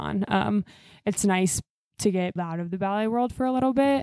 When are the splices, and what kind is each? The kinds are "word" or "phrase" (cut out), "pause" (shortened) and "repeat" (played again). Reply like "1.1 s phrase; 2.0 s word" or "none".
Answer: 2.4 s word